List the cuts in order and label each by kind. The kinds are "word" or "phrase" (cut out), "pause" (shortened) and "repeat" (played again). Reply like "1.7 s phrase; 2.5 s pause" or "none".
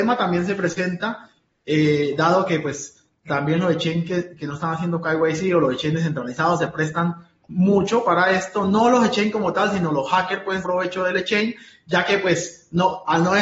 10.6 s word